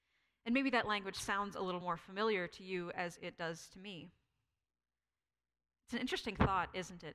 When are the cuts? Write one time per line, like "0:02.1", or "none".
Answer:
none